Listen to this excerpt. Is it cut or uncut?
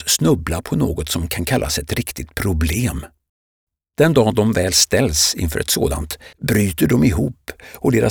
cut